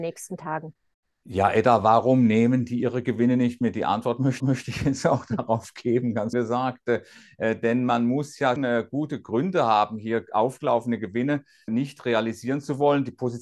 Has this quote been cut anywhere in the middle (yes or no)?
yes